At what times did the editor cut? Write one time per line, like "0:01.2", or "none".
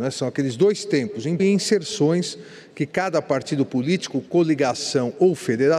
0:01.4